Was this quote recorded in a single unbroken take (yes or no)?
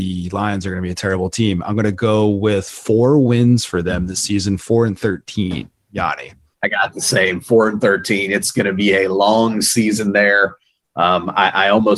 no